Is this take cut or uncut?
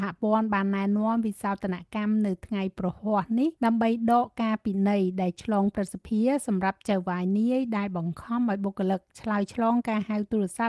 cut